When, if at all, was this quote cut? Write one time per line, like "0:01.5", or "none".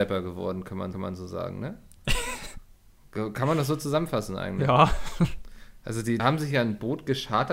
0:00.9
0:06.2